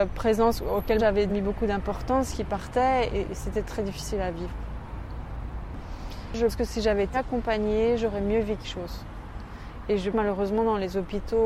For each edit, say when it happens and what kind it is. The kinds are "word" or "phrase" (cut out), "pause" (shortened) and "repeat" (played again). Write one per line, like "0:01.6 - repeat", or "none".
0:01.0 - word
0:01.3 - word
0:03.1 - word
0:06.5 - word
0:07.1 - word
0:08.6 - word
0:10.1 - word